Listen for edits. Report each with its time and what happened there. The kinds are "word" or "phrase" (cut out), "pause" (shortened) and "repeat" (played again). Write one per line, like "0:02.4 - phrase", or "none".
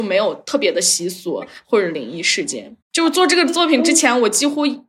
0:02.8 - pause